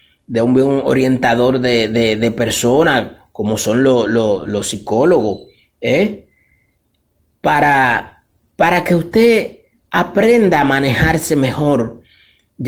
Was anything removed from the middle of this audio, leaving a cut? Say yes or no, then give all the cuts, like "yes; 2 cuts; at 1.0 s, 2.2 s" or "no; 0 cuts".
no; 0 cuts